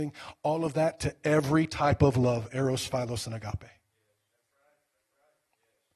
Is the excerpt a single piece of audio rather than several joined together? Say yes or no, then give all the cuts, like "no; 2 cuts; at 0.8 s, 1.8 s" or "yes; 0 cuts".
yes; 0 cuts